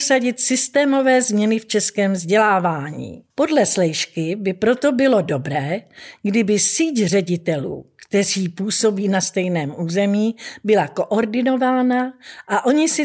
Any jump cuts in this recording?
yes; 1 cut; at 3.3 s

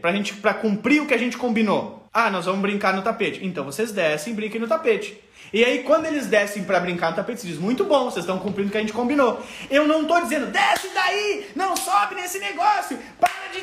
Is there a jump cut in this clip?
yes; 1 cut; at 2.1 s

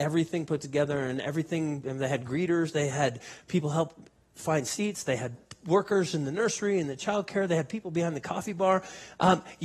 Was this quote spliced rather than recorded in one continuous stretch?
no; 0 cuts

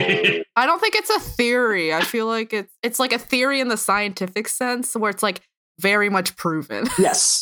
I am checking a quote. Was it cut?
no; 0 cuts

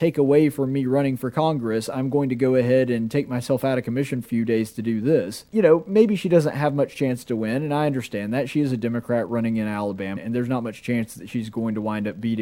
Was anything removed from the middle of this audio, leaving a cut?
yes; 3 cuts; at 4.2 s, 5.5 s, 10.2 s

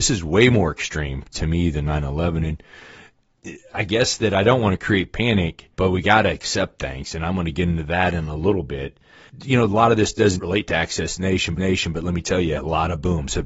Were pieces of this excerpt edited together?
yes; 5 cuts; at 3.7 s, 5.7 s, 10.4 s, 11.6 s, 12.6 s

